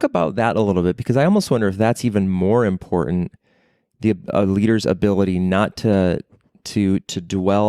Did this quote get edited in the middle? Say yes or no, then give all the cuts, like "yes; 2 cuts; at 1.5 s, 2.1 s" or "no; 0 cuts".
no; 0 cuts